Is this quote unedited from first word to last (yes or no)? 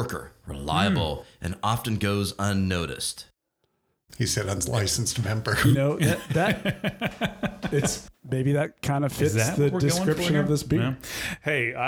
yes